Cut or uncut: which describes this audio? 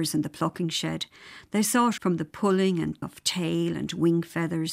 cut